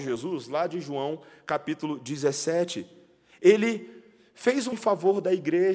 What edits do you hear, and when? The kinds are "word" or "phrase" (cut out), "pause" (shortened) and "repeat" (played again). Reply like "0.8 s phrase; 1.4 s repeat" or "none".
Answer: 4.7 s word